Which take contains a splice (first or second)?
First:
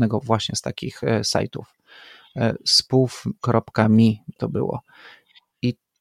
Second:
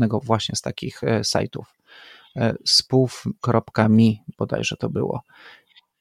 first